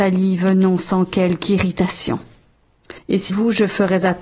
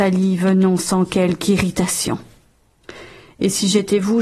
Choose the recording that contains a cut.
first; 2 cuts; at 3.0 s, 3.3 s

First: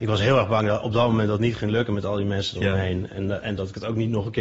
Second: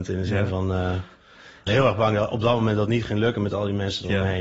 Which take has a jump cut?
second; 1 cut; at 1.7 s

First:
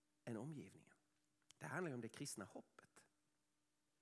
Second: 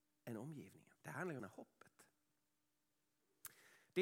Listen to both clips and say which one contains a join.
second; 2 cuts; at 1.0 s, 1.4 s

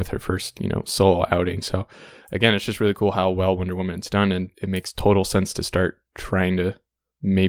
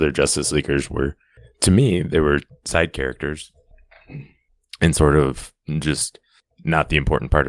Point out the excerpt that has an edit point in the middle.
first; 1 cut; at 4.5 s

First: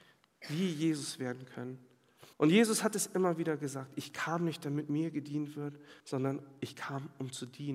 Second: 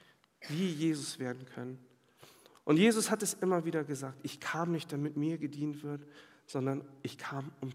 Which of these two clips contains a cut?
first; 2 cuts; at 2.3 s, 6.0 s

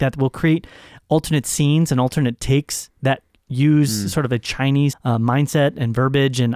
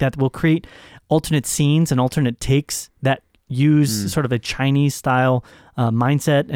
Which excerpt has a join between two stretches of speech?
first; 1 cut; at 4.9 s

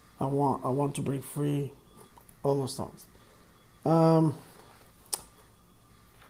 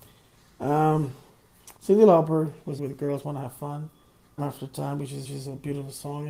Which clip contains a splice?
second; 4 cuts; at 1.8 s, 2.8 s, 4.4 s, 5.2 s

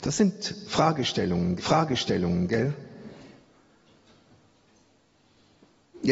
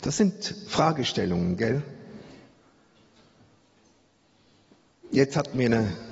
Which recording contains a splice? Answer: first; 1 cut; at 1.6 s

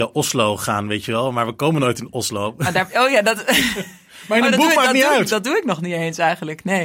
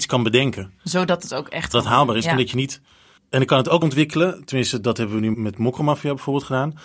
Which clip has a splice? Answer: second; 4 cuts; at 1.7 s, 3.2 s, 3.8 s, 5.3 s

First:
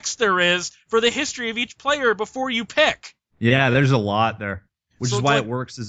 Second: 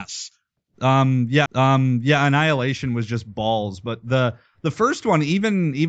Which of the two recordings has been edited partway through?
second; 1 cut; at 1.5 s

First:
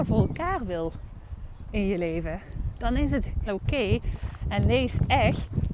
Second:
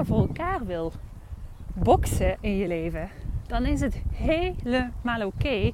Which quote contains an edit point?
first; 2 cuts; at 1.7 s, 3.5 s

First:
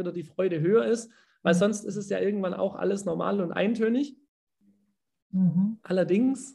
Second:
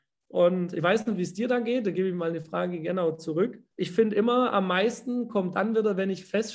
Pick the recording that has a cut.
second; 2 cuts; at 3.7 s, 5.3 s

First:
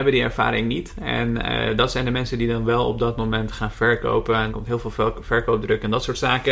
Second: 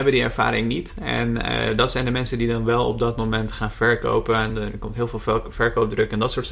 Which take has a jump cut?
first; 1 cut; at 4.5 s

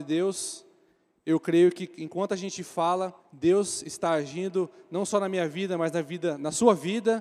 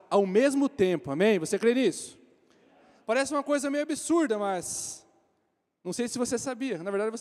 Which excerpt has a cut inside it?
first; 1 cut; at 3.2 s

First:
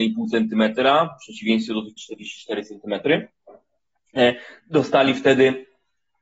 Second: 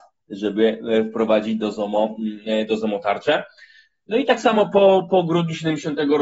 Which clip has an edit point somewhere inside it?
first; 1 cut; at 2.0 s

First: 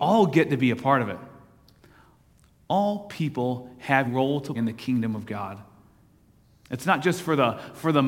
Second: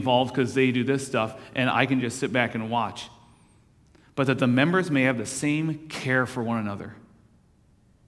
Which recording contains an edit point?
first; 2 cuts; at 4.0 s, 4.5 s

